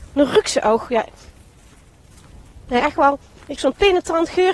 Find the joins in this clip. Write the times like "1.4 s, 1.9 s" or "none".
2.8 s, 3.6 s